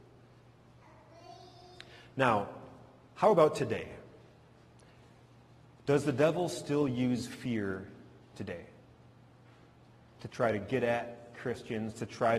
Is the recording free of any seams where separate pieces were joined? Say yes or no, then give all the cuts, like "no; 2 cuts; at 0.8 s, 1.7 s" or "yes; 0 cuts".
yes; 0 cuts